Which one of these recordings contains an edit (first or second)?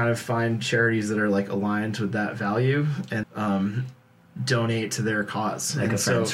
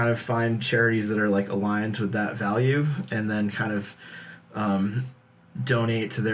first